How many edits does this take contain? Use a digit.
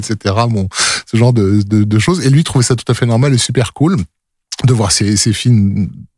0